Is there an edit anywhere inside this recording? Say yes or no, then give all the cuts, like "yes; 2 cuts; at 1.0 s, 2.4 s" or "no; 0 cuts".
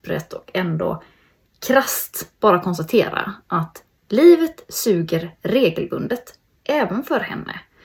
no; 0 cuts